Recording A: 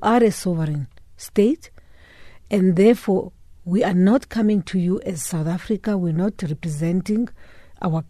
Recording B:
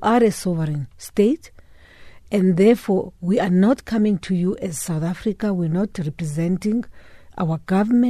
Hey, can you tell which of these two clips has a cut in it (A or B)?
B